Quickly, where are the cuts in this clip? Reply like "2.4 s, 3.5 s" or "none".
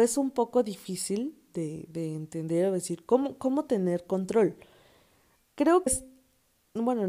5.9 s